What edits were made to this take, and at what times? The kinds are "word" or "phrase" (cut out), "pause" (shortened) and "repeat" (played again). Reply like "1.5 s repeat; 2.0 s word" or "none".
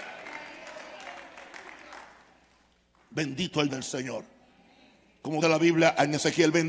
3.7 s word; 5.4 s word